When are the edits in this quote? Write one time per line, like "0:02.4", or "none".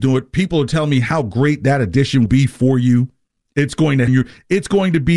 0:02.3
0:03.2
0:04.1